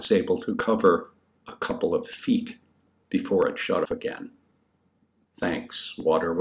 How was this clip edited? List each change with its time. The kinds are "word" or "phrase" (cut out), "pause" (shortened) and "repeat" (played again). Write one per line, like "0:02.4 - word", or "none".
0:03.8 - word